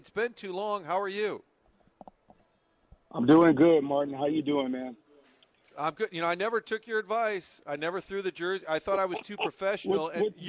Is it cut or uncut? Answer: uncut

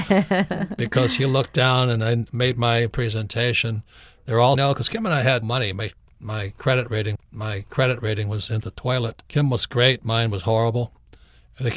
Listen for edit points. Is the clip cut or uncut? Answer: cut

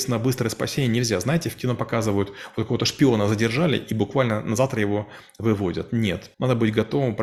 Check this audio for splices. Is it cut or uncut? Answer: cut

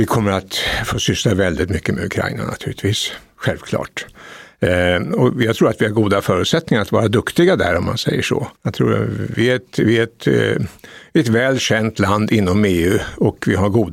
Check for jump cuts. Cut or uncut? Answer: cut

